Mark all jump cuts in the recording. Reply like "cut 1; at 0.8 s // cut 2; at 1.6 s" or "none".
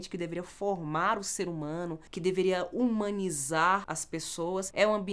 none